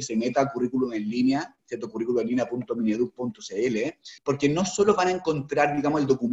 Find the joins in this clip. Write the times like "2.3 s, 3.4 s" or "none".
4.2 s